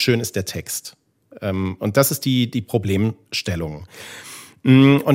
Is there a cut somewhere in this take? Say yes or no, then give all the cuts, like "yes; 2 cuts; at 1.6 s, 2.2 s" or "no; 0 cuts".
no; 0 cuts